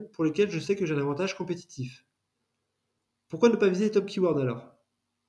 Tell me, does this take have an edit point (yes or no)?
no